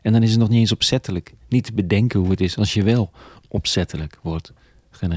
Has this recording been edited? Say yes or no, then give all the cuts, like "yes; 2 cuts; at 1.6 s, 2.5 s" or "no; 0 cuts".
no; 0 cuts